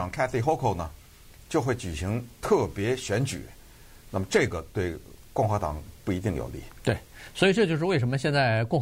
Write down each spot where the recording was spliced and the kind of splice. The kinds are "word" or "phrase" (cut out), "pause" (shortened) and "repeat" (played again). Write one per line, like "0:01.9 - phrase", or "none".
none